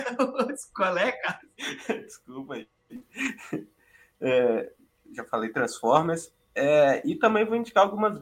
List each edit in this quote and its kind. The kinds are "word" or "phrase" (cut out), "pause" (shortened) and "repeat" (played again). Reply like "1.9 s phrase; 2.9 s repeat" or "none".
none